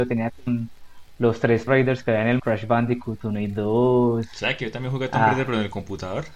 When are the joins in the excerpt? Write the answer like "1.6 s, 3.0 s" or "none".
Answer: 1.7 s, 2.4 s